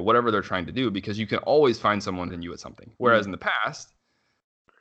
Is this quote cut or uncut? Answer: cut